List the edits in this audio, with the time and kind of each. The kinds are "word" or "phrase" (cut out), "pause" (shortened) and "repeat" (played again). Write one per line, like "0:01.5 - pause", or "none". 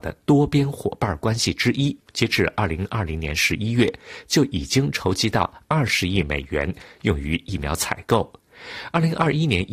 0:02.0 - pause